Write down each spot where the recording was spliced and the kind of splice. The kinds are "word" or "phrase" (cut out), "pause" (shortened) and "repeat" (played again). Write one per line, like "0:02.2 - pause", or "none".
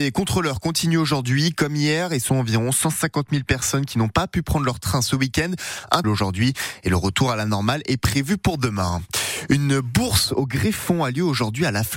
0:02.3 - word
0:06.0 - phrase